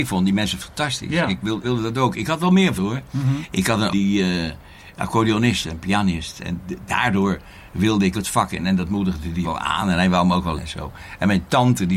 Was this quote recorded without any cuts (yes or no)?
no